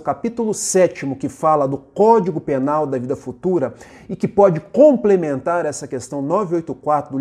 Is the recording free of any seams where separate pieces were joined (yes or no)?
yes